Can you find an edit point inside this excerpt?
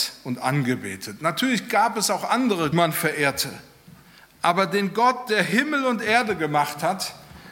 yes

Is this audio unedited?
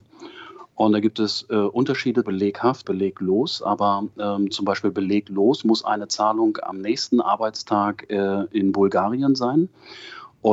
no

